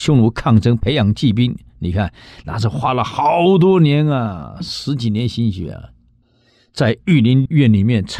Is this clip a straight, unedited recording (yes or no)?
yes